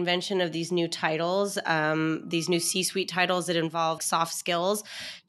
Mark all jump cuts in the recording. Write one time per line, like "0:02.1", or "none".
0:04.0